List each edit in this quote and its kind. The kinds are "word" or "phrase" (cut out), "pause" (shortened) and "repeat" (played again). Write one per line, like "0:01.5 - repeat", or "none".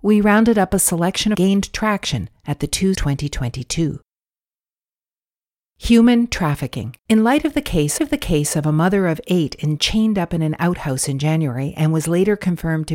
0:01.3 - phrase
0:02.9 - word
0:07.0 - pause
0:08.0 - repeat
0:09.8 - phrase